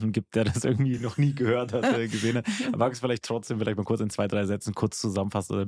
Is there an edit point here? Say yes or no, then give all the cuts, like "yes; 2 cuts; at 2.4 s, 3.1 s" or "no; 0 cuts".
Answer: no; 0 cuts